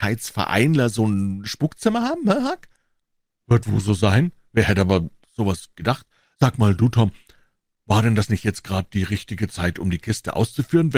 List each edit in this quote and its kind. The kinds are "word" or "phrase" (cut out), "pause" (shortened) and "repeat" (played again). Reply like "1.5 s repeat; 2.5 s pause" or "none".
none

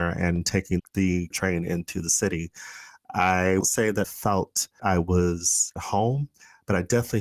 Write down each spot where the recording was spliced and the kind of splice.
1.3 s word; 3.6 s word; 4.0 s word; 4.8 s word; 5.8 s word

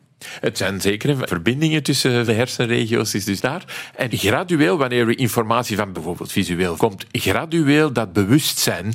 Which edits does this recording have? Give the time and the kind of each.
1.3 s word; 2.3 s word; 3.4 s word; 4.1 s word; 5.9 s word; 6.8 s word

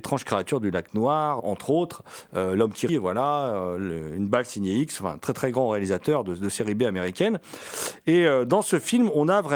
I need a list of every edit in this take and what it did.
1.4 s word; 2.9 s word

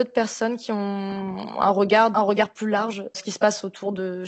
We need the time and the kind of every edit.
2.1 s word; 3.1 s word

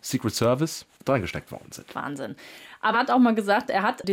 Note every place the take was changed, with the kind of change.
2.9 s word

